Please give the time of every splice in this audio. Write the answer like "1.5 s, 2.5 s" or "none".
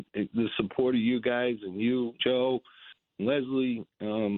2.2 s